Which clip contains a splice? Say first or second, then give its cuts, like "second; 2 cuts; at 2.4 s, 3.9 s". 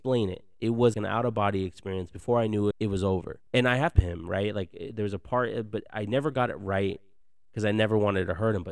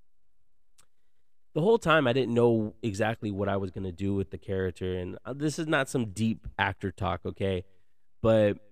first; 4 cuts; at 0.9 s, 2.7 s, 3.5 s, 4.0 s